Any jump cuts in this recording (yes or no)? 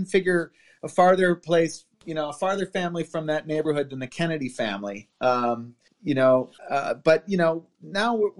yes